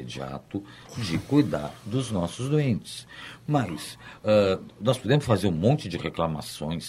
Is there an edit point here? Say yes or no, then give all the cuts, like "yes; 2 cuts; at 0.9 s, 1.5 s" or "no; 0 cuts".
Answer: no; 0 cuts